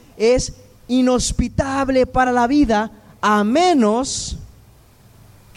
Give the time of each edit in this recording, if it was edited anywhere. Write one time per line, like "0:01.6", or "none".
none